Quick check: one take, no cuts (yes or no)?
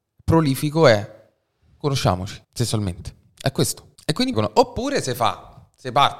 no